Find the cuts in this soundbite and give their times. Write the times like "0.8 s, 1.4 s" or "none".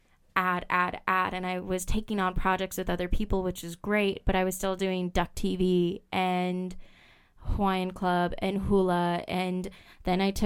none